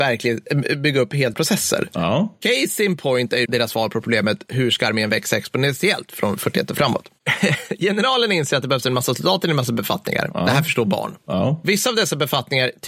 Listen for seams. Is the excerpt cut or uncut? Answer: cut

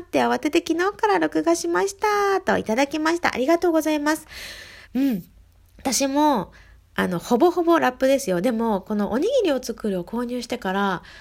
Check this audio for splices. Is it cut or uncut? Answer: cut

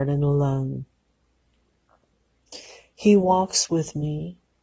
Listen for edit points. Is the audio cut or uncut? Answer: uncut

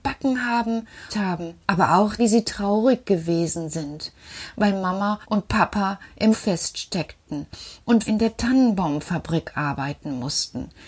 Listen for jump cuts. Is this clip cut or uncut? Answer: cut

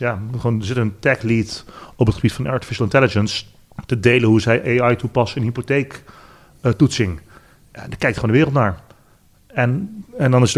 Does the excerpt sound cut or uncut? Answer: uncut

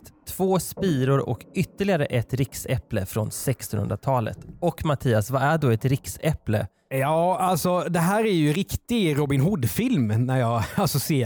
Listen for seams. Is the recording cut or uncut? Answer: uncut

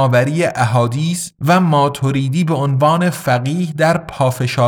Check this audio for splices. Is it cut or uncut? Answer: cut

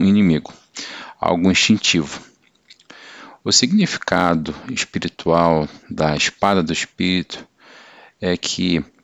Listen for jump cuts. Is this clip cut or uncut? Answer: uncut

